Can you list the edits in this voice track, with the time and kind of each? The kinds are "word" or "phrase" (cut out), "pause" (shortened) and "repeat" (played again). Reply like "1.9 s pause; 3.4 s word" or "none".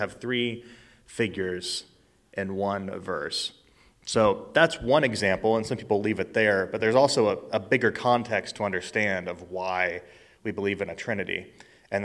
none